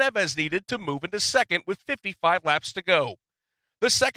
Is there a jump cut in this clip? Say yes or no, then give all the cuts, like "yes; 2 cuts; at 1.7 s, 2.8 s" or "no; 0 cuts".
no; 0 cuts